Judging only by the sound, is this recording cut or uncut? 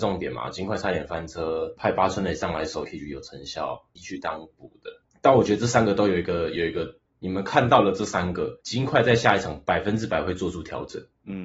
cut